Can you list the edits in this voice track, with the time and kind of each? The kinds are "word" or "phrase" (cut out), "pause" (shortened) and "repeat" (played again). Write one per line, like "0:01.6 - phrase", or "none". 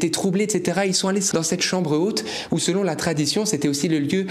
0:01.3 - word